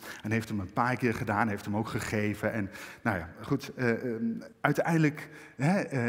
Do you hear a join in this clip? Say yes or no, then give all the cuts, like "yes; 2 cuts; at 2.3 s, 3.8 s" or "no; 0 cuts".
yes; 1 cut; at 4.5 s